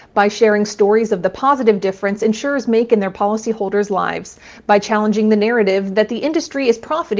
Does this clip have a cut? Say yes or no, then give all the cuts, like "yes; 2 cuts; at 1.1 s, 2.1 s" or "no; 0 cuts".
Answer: no; 0 cuts